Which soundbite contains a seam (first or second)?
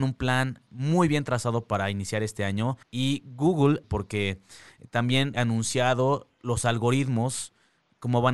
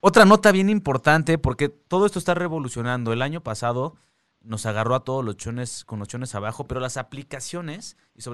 first